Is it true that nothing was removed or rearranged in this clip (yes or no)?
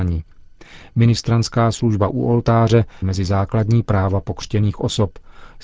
no